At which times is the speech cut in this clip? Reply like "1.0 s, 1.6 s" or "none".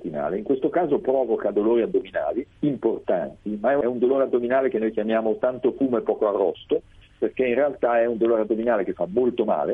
none